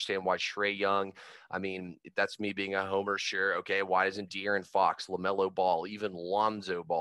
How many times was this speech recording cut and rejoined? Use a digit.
0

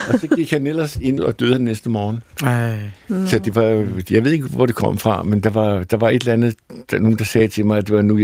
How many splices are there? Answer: 2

